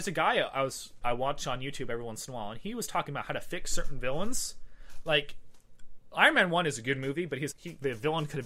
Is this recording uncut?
no; 2 cuts; at 1.0 s, 7.5 s

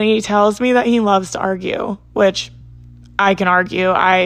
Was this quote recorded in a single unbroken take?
yes; 0 cuts

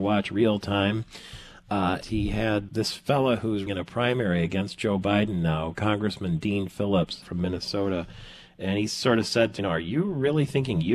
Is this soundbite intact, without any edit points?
no; 6 cuts; at 2.0 s, 2.7 s, 3.7 s, 5.7 s, 7.2 s, 9.6 s

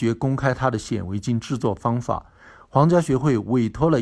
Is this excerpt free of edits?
yes; 0 cuts

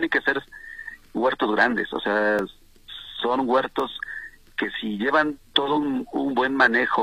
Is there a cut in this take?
no; 0 cuts

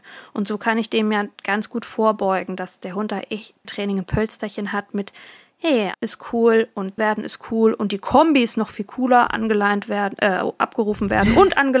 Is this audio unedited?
no; 3 cuts; at 3.6 s, 5.9 s, 7.0 s

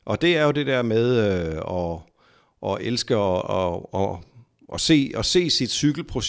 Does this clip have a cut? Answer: no; 0 cuts

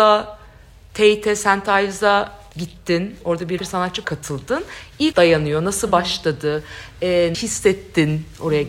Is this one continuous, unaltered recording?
no; 5 cuts; at 2.5 s, 3.6 s, 4.0 s, 5.1 s, 7.3 s

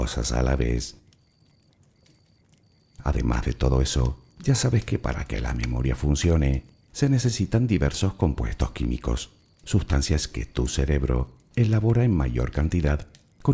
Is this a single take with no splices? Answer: yes; 0 cuts

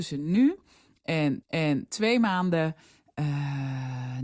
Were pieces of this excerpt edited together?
yes; 1 cut; at 1.4 s

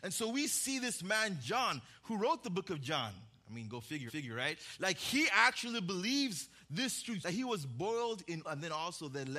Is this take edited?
yes; 4 cuts; at 1.4 s, 4.1 s, 7.2 s, 8.4 s

